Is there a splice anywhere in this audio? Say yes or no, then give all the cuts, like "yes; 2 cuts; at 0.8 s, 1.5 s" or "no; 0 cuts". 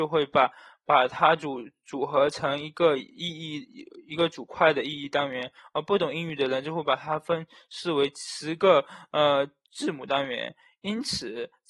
no; 0 cuts